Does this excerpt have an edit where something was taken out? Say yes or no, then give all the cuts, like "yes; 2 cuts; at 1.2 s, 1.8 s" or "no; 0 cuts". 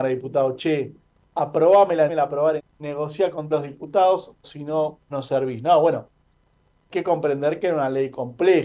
yes; 6 cuts; at 2.1 s, 2.6 s, 3.5 s, 4.4 s, 5.1 s, 6.9 s